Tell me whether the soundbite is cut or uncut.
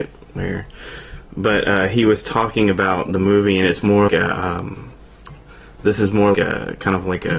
cut